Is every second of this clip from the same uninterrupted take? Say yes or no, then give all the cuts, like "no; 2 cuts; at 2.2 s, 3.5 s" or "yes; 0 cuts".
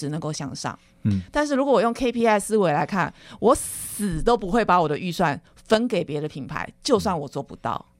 yes; 0 cuts